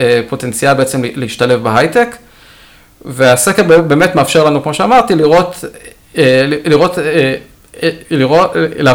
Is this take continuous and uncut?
yes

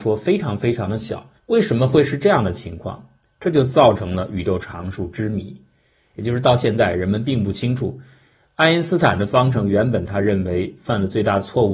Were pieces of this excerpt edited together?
yes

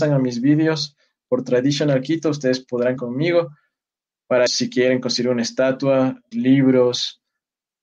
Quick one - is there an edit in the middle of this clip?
yes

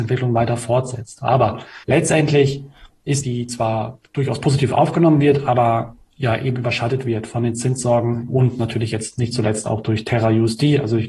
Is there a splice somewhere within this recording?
yes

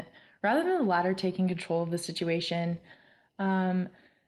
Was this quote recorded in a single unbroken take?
yes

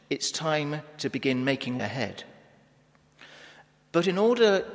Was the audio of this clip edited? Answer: yes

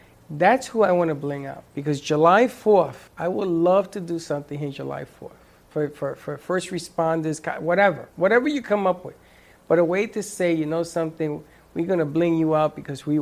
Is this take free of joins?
no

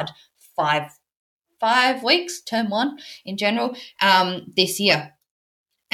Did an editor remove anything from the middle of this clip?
no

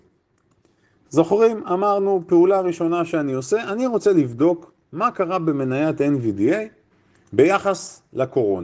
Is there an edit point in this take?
yes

